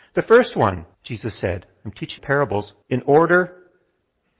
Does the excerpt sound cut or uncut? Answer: cut